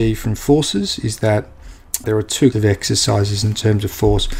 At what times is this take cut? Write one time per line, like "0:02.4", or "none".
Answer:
0:02.0
0:02.5